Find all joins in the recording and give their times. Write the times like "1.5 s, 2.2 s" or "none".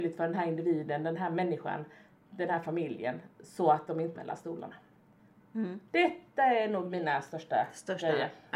4.1 s